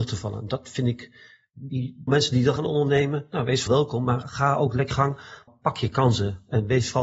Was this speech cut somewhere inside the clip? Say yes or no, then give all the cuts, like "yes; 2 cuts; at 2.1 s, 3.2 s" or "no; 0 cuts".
yes; 6 cuts; at 2.1 s, 2.6 s, 3.7 s, 4.2 s, 4.9 s, 5.5 s